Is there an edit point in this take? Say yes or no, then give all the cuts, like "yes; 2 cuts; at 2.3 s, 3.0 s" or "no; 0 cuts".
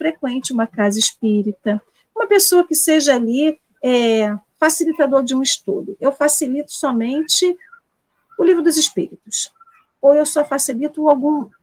no; 0 cuts